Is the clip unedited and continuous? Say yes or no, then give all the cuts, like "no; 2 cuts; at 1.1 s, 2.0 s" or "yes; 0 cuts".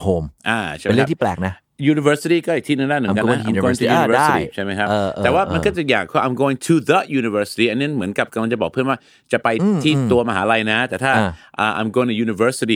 yes; 0 cuts